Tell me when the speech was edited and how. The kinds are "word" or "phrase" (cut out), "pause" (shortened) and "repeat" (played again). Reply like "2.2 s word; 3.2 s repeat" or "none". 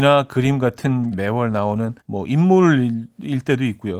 1.1 s word; 2.0 s pause